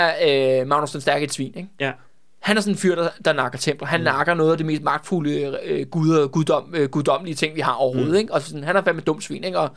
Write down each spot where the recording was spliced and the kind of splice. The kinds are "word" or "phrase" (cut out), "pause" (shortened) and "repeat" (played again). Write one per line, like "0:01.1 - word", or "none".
none